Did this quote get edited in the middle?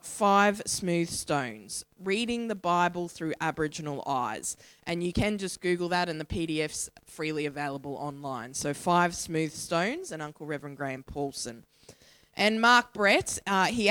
no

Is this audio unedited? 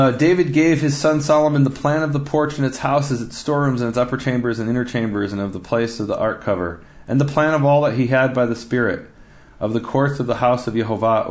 yes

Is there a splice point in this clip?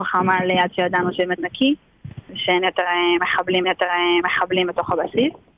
yes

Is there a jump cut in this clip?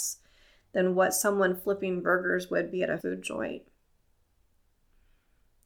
yes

